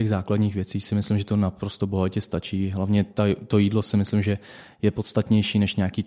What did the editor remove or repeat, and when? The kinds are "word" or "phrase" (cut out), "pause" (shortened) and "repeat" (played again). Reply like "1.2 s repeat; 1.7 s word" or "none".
none